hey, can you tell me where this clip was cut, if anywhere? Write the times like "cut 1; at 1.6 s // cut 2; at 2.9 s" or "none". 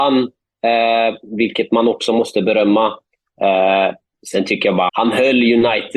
cut 1; at 4.9 s